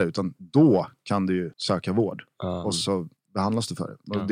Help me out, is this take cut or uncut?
cut